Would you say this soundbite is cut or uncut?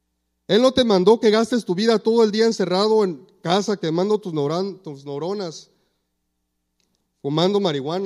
uncut